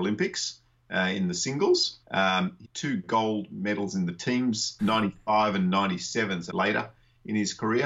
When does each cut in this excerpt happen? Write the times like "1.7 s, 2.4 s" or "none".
2.0 s, 2.6 s, 4.8 s, 6.5 s